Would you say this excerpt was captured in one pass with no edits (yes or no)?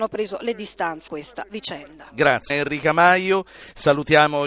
no